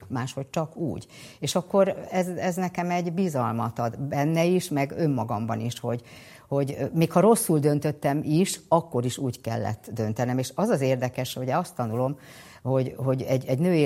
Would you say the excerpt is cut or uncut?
uncut